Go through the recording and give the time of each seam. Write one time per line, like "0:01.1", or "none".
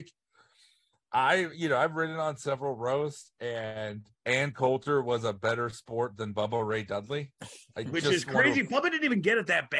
0:04.1
0:07.4